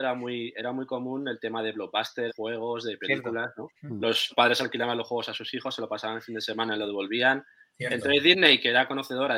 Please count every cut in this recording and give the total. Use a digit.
3